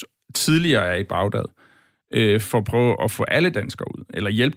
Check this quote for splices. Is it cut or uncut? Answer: uncut